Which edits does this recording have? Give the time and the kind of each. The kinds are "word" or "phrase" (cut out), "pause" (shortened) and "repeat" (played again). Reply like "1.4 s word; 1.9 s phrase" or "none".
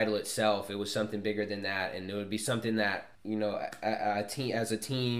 3.1 s pause